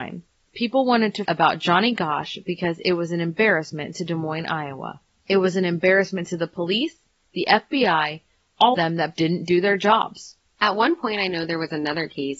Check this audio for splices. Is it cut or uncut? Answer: cut